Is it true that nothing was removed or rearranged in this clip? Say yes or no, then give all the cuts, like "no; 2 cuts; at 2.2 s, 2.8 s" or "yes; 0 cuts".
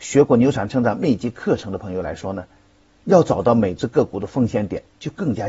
yes; 0 cuts